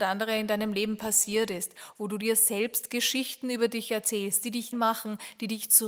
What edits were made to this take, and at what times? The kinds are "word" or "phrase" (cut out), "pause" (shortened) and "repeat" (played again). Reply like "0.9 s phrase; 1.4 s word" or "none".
4.7 s word